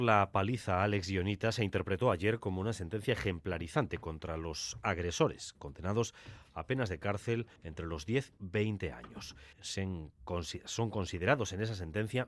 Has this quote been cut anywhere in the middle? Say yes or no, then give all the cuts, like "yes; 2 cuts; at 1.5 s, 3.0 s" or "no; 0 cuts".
yes; 3 cuts; at 7.6 s, 8.4 s, 9.5 s